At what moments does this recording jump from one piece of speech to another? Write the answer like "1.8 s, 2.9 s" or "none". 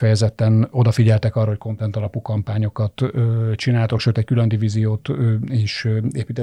none